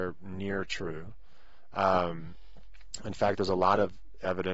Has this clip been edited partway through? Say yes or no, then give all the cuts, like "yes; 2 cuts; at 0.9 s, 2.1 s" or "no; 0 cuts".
no; 0 cuts